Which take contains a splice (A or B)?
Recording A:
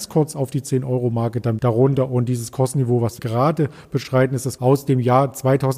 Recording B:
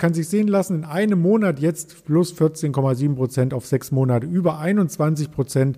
A